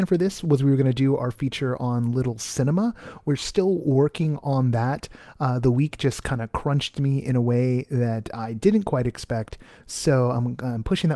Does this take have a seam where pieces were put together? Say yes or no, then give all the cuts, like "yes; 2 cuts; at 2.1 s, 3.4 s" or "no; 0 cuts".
no; 0 cuts